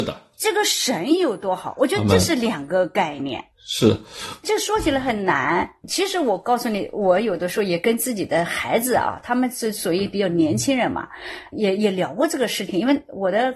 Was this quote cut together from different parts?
yes; 1 cut; at 11.5 s

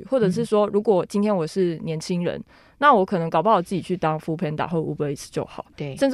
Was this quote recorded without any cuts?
yes; 0 cuts

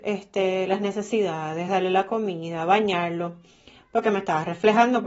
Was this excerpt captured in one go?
yes; 0 cuts

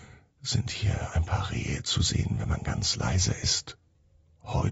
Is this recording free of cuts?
yes; 0 cuts

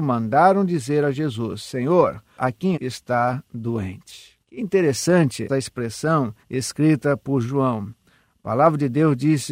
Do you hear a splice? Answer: yes; 5 cuts; at 2.4 s, 2.7 s, 4.4 s, 5.5 s, 6.4 s

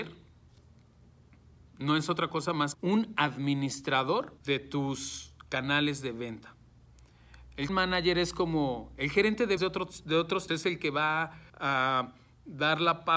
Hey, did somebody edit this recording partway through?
yes; 6 cuts; at 2.7 s, 4.4 s, 7.7 s, 9.6 s, 10.5 s, 11.5 s

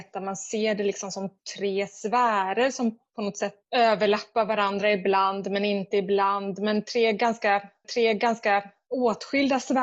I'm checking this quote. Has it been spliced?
yes; 1 cut; at 7.8 s

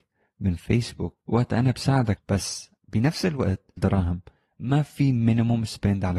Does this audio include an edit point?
yes; 4 cuts; at 1.2 s, 2.2 s, 2.8 s, 3.8 s

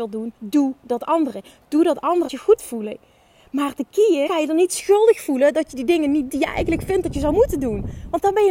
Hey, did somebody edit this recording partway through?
yes; 4 cuts; at 2.3 s, 2.6 s, 4.3 s, 6.3 s

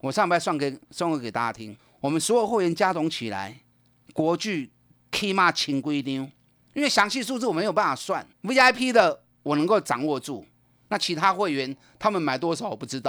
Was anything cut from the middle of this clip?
yes; 1 cut; at 8.3 s

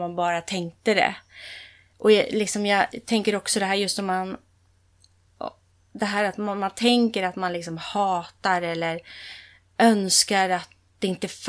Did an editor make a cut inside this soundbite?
no; 0 cuts

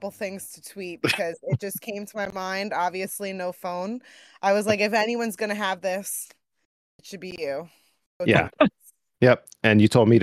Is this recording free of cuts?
yes; 0 cuts

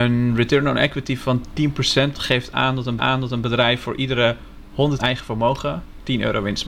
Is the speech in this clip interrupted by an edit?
yes; 3 cuts; at 2.1 s, 3.0 s, 5.0 s

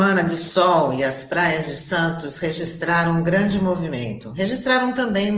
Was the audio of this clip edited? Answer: no; 0 cuts

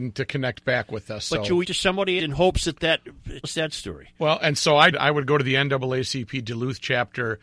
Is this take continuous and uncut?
no; 4 cuts; at 1.6 s, 2.2 s, 3.4 s, 4.9 s

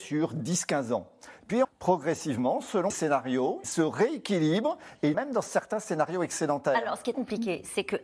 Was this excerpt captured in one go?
no; 5 cuts; at 1.6 s, 2.9 s, 3.6 s, 5.1 s, 7.1 s

